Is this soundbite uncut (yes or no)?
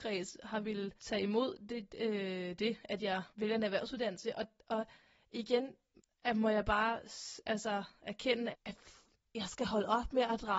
no